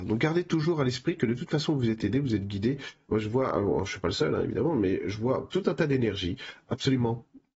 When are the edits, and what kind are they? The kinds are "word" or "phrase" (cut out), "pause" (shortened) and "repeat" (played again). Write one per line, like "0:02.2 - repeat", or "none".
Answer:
none